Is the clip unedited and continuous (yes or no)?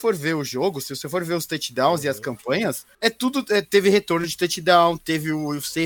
no